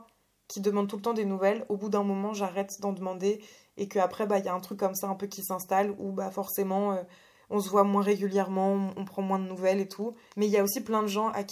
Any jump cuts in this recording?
no; 0 cuts

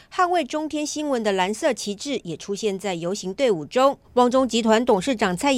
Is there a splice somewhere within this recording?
yes; 1 cut; at 4.0 s

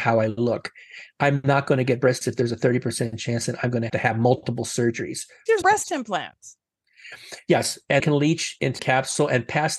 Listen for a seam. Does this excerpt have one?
yes; 5 cuts; at 2.2 s, 3.9 s, 5.6 s, 8.0 s, 8.8 s

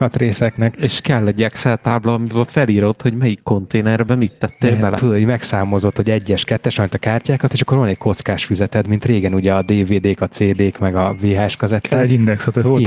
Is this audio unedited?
yes; 0 cuts

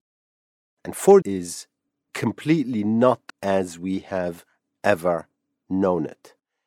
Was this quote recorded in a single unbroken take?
no; 2 cuts; at 1.2 s, 3.3 s

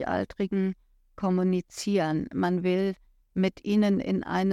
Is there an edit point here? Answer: no; 0 cuts

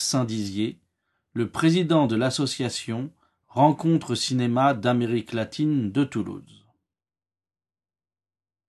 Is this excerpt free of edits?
yes; 0 cuts

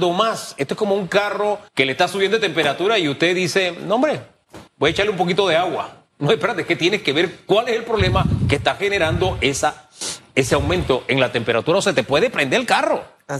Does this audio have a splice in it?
yes; 2 cuts; at 1.7 s, 4.7 s

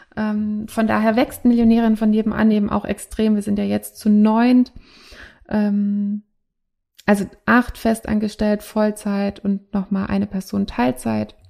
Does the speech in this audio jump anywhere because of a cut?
no; 0 cuts

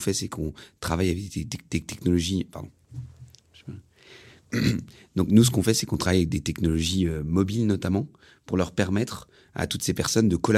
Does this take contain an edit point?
no; 0 cuts

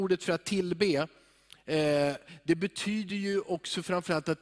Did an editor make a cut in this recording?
no; 0 cuts

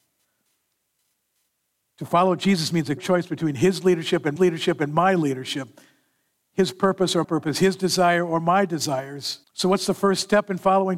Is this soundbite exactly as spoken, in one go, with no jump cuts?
no; 4 cuts; at 3.0 s, 4.4 s, 7.2 s, 9.4 s

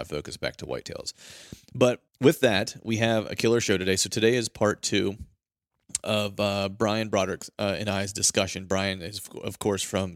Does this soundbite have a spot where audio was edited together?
yes; 1 cut; at 2.1 s

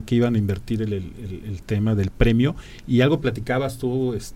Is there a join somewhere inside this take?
no; 0 cuts

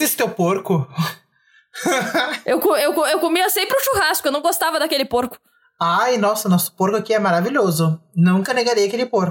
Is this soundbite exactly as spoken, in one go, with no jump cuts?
yes; 0 cuts

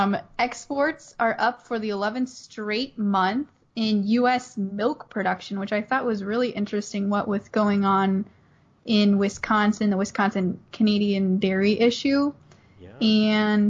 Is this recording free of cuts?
yes; 0 cuts

